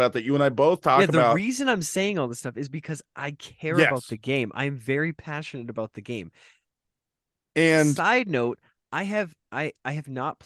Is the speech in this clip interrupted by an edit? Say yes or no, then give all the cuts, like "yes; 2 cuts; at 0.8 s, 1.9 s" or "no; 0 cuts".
no; 0 cuts